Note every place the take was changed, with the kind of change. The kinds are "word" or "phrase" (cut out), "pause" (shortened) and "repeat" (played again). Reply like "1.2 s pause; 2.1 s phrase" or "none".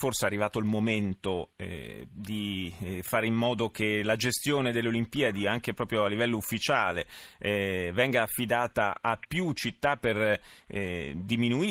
none